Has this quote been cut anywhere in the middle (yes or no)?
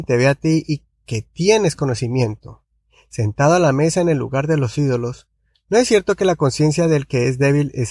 no